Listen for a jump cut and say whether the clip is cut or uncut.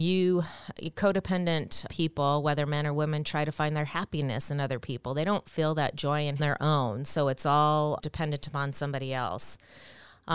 cut